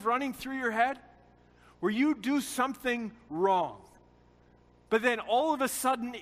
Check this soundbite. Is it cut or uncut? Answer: uncut